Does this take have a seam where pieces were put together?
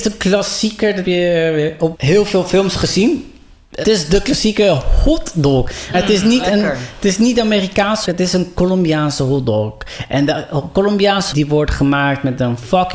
yes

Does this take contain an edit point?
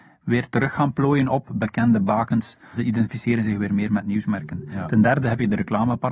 no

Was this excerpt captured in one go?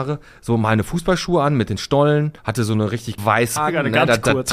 no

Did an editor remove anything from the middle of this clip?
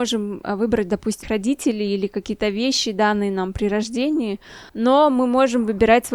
yes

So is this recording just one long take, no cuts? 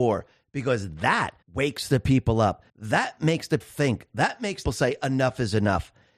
no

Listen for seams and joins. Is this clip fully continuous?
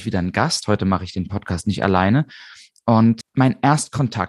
yes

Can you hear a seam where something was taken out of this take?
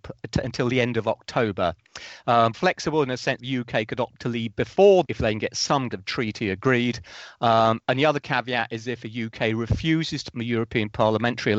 yes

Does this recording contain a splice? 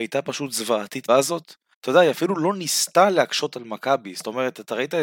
yes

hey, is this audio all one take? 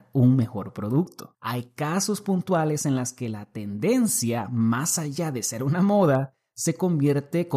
no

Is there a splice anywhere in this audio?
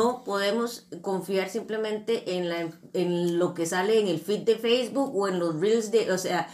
no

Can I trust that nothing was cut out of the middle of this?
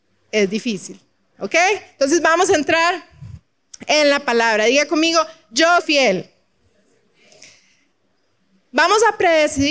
no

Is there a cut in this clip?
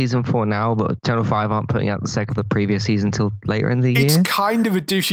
yes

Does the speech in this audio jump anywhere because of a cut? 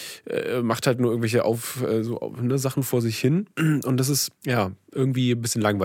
yes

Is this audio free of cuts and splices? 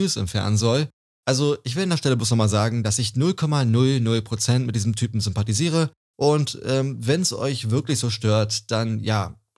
yes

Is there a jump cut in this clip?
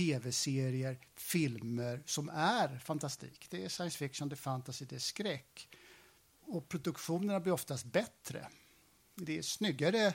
no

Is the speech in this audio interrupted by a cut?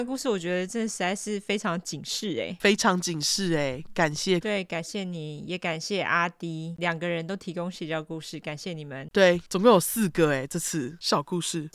yes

